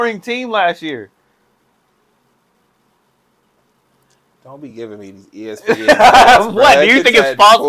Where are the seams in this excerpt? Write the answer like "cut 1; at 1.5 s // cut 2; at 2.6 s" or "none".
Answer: none